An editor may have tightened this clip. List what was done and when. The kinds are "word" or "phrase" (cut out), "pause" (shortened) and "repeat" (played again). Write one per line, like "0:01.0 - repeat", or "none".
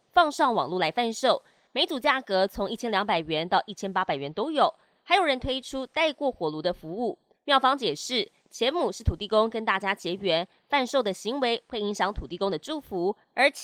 0:07.3 - pause